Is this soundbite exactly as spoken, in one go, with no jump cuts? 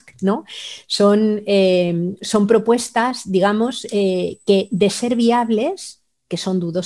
yes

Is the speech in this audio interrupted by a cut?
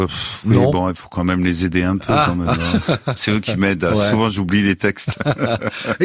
yes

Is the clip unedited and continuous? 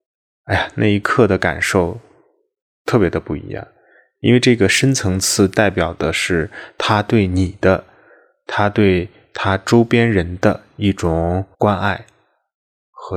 no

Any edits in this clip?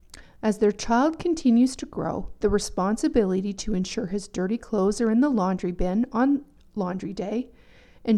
no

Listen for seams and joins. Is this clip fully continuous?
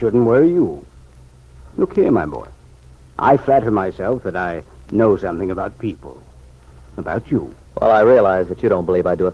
yes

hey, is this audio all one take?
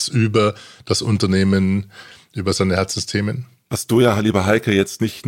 yes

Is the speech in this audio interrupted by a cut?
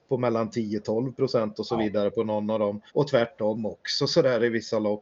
yes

